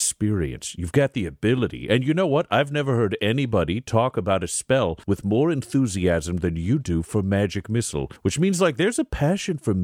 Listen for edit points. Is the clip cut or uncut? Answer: cut